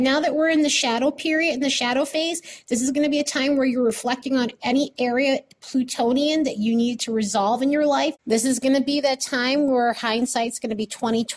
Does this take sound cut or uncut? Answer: cut